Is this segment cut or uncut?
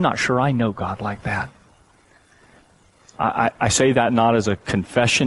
uncut